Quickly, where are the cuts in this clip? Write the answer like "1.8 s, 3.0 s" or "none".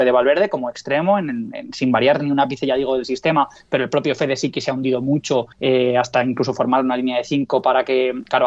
5.5 s